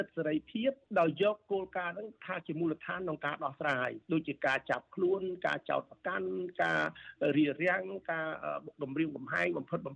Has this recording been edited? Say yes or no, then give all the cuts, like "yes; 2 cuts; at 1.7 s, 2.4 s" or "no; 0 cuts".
yes; 1 cut; at 4.0 s